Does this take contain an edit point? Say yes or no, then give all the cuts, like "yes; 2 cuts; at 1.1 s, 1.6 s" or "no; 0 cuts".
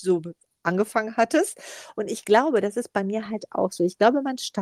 no; 0 cuts